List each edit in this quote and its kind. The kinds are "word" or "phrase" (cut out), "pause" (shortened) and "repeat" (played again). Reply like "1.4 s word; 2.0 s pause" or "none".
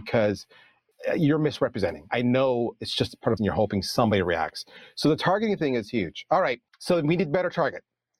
3.4 s phrase